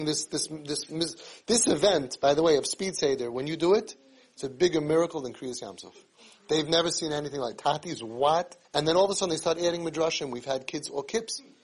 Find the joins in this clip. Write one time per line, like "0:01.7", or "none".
0:08.6